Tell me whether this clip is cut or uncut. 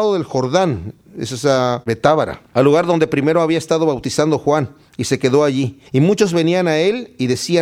cut